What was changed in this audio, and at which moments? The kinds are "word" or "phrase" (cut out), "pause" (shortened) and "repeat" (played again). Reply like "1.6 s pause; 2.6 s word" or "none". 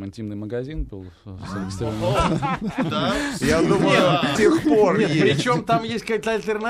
4.4 s word